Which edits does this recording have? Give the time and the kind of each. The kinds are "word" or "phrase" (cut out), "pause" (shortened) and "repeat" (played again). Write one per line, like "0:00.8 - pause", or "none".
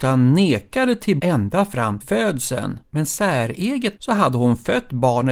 0:01.2 - word
0:02.0 - word
0:02.8 - pause
0:04.0 - word